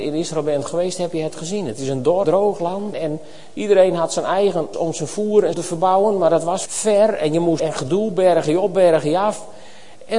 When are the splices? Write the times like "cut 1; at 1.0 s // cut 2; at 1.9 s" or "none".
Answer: cut 1; at 2.2 s // cut 2; at 2.9 s // cut 3; at 4.7 s // cut 4; at 5.5 s // cut 5; at 6.7 s // cut 6; at 7.6 s

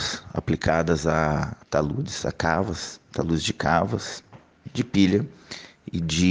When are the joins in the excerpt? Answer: cut 1; at 1.6 s

